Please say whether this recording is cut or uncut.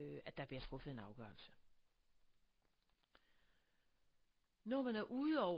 uncut